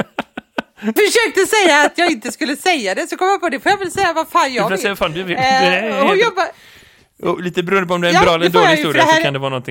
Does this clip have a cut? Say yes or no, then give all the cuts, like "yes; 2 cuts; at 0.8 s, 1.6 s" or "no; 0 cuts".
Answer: yes; 1 cut; at 1.0 s